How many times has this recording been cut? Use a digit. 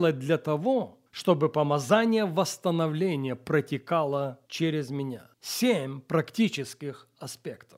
3